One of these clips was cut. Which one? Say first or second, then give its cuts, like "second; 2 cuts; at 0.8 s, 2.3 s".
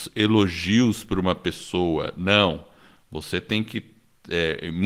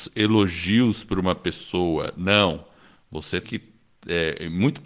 second; 1 cut; at 3.4 s